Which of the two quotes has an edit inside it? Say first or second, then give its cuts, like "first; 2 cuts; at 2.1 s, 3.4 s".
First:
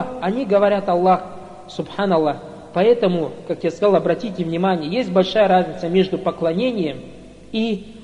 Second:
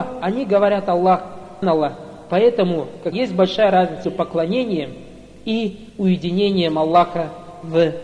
second; 4 cuts; at 1.6 s, 3.1 s, 4.0 s, 5.9 s